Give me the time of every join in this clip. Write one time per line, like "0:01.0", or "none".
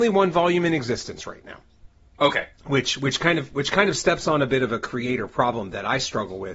none